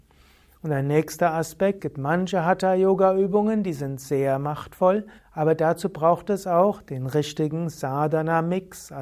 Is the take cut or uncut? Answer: cut